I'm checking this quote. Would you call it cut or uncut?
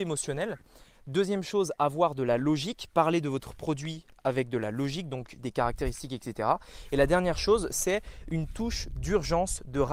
uncut